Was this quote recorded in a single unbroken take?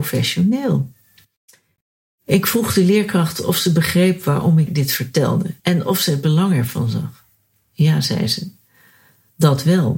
no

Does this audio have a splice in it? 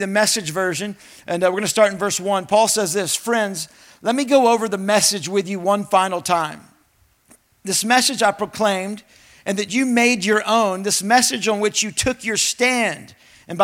no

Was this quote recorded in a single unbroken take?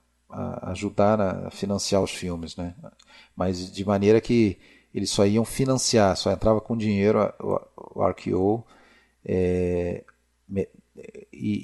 yes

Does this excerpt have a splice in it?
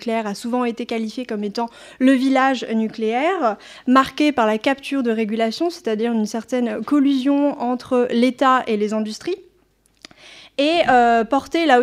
no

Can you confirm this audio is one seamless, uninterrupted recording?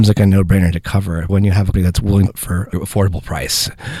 no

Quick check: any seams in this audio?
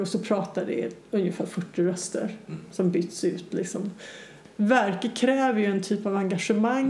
no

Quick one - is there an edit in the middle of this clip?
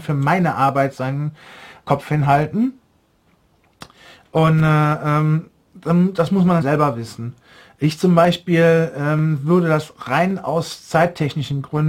yes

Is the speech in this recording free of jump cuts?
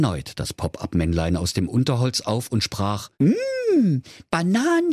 no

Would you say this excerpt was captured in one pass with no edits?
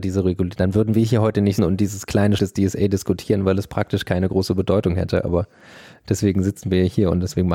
no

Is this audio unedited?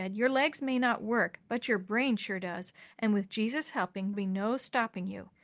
no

